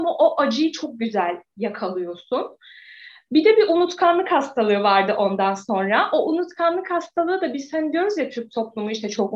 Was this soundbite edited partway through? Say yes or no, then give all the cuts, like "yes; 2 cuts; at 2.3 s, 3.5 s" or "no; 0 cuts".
no; 0 cuts